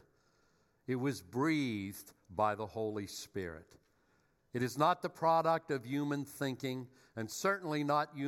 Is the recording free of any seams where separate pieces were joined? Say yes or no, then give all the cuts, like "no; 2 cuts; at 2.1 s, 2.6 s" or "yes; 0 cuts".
yes; 0 cuts